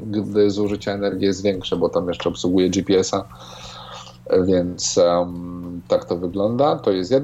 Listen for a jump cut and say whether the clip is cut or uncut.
uncut